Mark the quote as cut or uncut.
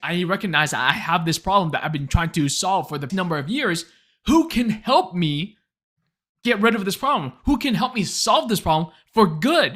cut